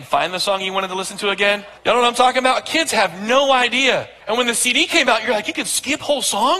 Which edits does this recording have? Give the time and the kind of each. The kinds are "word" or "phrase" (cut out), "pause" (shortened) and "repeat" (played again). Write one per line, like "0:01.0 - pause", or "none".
0:01.8 - pause
0:04.2 - pause